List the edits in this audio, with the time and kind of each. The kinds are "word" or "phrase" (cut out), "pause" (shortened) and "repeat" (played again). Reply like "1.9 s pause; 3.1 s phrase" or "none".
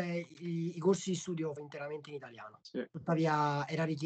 1.6 s word